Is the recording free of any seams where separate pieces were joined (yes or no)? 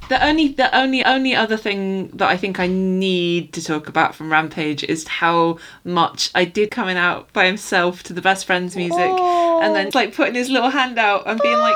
no